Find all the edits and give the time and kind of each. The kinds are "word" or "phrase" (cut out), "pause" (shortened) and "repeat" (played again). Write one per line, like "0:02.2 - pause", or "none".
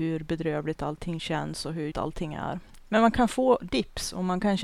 0:01.9 - word